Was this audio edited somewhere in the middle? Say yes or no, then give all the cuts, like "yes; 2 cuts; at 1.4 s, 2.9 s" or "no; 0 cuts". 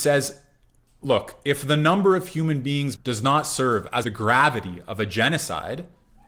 yes; 2 cuts; at 2.9 s, 4.0 s